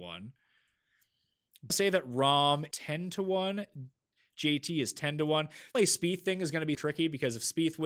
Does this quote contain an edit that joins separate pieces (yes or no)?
yes